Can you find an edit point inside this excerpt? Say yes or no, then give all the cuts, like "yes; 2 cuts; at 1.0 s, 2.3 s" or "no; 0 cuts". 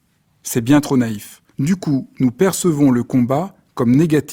yes; 1 cut; at 1.5 s